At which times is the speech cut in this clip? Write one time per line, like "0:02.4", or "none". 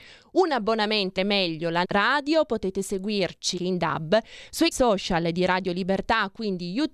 0:01.2
0:01.8
0:03.6
0:04.7